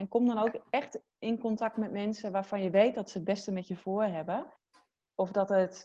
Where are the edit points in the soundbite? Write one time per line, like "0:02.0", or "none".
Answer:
none

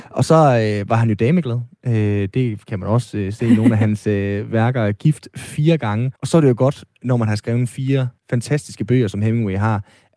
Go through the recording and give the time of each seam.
0:06.2
0:08.2

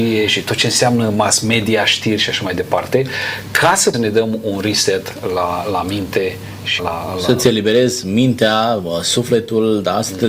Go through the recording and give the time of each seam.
0:03.9
0:06.8

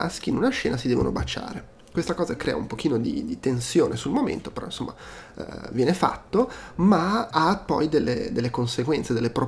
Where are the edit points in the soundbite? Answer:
0:07.3

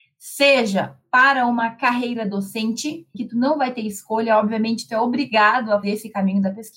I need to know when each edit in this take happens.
0:03.1
0:05.8

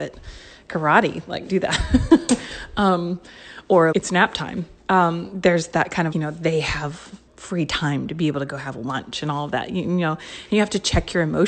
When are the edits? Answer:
0:01.5
0:03.9
0:06.1
0:07.3

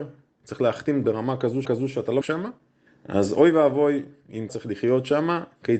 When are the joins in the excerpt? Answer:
0:01.0
0:01.6
0:02.2
0:02.9
0:04.5

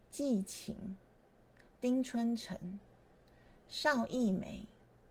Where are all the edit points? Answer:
none

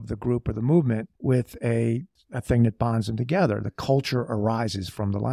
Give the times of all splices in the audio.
0:01.2
0:02.2

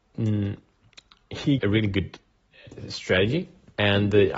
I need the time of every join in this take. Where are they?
0:01.6

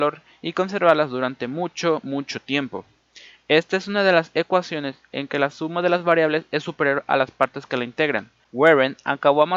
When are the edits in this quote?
none

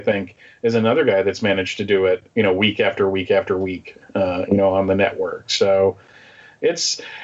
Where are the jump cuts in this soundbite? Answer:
0:02.3

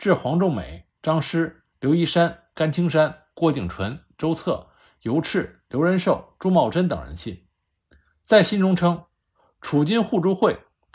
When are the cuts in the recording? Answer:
none

